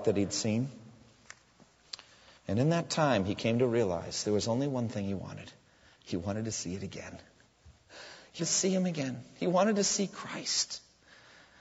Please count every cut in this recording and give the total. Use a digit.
1